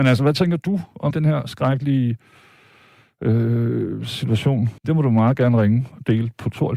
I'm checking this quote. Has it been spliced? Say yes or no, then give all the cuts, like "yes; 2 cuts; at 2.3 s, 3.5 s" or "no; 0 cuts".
yes; 2 cuts; at 1.1 s, 4.8 s